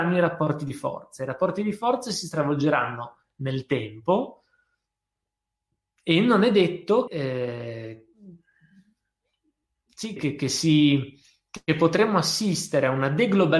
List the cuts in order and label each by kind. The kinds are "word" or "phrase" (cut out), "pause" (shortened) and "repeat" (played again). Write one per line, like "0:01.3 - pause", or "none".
0:07.1 - word
0:10.2 - word